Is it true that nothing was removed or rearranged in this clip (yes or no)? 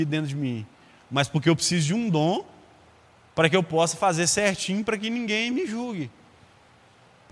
yes